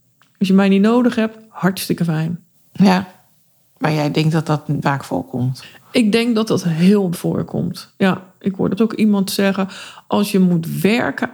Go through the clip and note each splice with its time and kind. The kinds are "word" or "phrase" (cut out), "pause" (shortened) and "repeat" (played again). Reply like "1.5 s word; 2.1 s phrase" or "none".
4.8 s word; 7.1 s word; 8.8 s word